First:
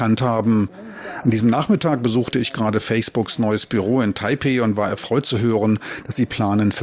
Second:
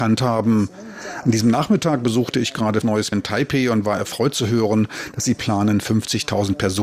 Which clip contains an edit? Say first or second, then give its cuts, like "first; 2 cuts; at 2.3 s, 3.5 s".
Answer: second; 2 cuts; at 2.8 s, 3.1 s